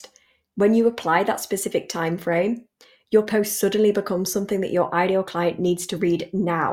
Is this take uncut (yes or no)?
yes